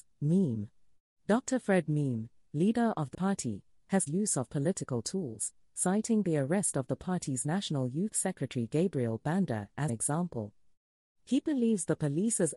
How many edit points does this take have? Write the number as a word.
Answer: four